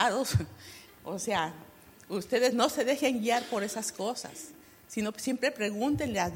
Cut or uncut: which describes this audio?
uncut